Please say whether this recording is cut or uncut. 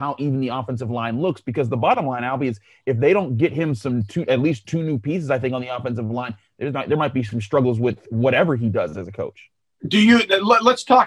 uncut